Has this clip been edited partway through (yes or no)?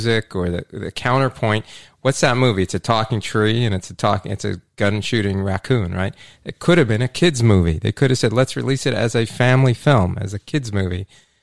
no